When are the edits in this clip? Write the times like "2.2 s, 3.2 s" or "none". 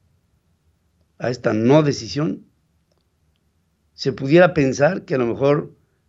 none